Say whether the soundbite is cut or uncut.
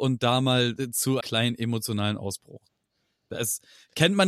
cut